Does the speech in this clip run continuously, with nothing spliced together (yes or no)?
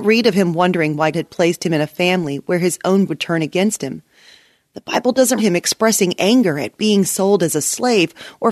no